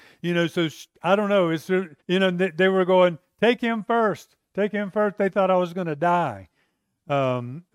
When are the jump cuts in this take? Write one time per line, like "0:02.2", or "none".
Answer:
0:02.0